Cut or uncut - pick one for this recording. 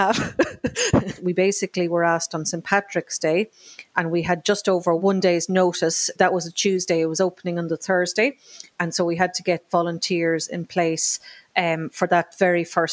uncut